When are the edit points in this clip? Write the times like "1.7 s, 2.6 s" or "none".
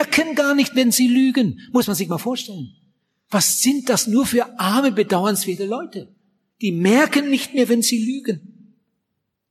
none